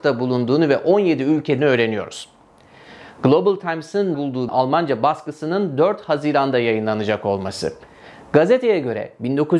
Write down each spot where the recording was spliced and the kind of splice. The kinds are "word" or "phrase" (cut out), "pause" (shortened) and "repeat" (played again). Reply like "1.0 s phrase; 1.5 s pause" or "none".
1.6 s phrase; 4.1 s word; 4.5 s phrase